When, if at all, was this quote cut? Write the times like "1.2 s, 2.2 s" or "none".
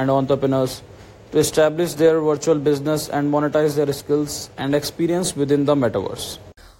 none